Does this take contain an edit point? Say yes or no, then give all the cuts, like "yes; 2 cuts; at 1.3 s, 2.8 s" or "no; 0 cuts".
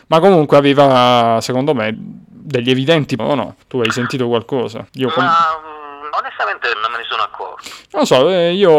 yes; 6 cuts; at 1.9 s, 3.2 s, 3.6 s, 4.9 s, 6.1 s, 6.7 s